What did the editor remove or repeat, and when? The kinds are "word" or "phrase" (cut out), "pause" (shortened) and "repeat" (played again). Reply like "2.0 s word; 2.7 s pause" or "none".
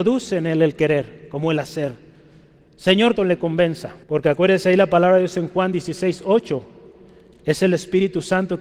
3.2 s phrase; 4.0 s pause